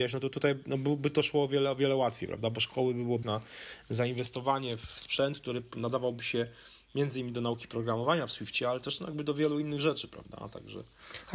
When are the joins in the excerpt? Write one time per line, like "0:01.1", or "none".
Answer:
0:03.2